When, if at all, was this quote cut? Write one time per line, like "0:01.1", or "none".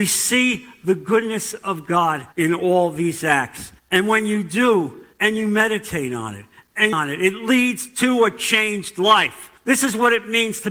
0:02.3
0:03.8
0:05.1
0:06.9
0:09.6